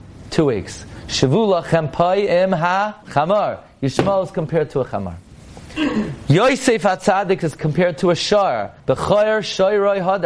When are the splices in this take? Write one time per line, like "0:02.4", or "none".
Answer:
0:03.0
0:05.3
0:08.8